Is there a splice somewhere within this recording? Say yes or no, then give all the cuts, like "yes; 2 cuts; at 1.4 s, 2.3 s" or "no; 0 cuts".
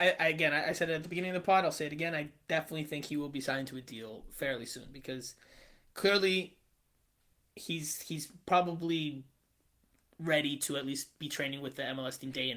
no; 0 cuts